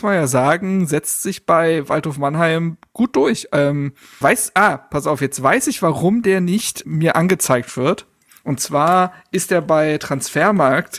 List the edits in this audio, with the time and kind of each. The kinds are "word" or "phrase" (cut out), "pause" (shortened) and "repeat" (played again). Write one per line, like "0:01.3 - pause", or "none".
0:04.2 - word
0:06.8 - word